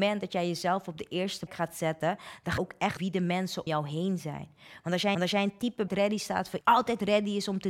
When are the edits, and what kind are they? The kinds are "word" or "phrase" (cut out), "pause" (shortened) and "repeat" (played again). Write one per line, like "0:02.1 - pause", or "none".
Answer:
0:01.5 - word
0:02.6 - word
0:03.0 - word
0:03.7 - word
0:05.1 - repeat
0:05.9 - phrase
0:06.6 - word